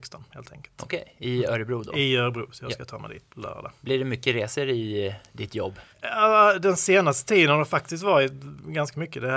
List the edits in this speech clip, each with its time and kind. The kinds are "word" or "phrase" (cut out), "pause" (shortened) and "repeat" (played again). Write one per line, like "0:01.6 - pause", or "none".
0:03.3 - word
0:03.8 - pause
0:05.9 - pause